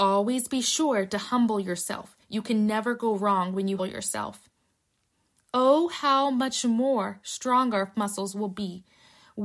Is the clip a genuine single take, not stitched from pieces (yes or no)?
no